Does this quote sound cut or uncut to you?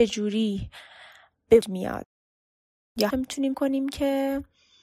cut